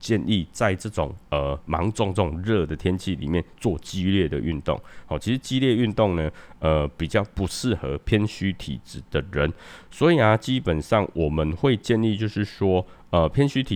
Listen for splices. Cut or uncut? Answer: uncut